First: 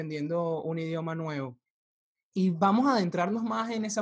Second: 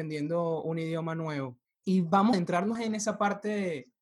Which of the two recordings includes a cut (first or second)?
second